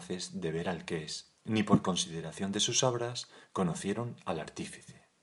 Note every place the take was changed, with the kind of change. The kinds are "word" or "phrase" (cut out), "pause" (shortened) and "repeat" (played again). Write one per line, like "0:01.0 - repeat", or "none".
0:01.4 - pause